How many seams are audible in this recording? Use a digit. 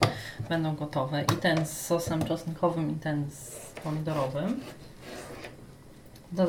0